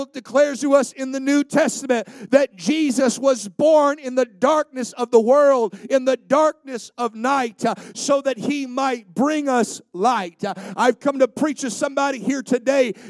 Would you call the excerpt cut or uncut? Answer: uncut